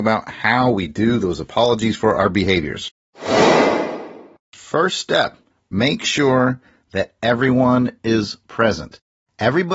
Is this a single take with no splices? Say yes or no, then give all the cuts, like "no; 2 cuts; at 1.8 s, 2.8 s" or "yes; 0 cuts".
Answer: yes; 0 cuts